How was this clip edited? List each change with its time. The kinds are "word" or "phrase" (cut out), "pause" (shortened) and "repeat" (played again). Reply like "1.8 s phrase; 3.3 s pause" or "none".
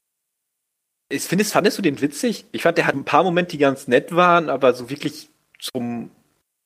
2.9 s word